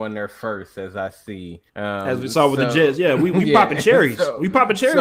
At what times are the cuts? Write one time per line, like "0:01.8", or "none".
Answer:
0:01.7